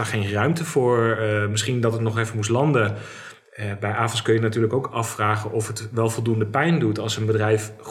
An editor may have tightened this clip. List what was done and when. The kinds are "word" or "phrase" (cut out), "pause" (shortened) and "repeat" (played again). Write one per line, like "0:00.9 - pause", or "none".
none